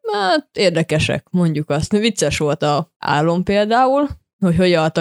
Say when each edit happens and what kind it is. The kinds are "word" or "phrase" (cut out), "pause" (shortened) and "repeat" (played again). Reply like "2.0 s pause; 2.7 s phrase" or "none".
2.9 s pause